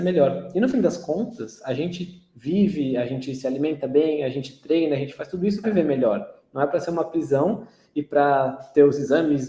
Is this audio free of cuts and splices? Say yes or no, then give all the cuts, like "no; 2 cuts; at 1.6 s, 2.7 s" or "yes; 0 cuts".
no; 1 cut; at 5.6 s